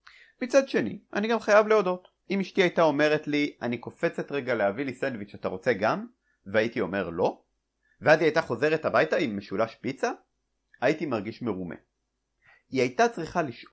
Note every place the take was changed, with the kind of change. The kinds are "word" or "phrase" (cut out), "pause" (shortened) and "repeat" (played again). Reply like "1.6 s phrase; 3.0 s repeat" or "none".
none